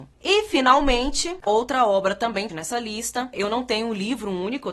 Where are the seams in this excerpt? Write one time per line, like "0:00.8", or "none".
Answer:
0:01.5
0:02.5